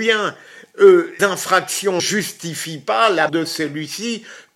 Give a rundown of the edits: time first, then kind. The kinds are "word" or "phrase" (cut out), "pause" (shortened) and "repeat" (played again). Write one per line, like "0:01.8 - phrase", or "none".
0:01.2 - word
0:02.0 - phrase
0:03.3 - word